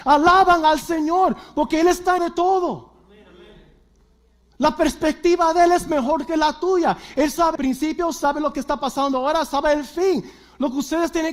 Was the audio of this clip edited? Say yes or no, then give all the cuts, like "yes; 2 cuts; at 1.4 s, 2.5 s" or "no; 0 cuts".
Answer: yes; 2 cuts; at 2.2 s, 7.6 s